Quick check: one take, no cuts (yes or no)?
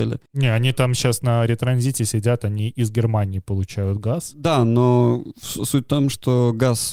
yes